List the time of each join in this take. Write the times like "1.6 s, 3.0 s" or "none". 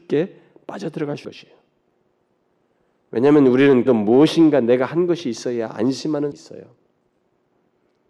1.2 s, 3.9 s, 6.3 s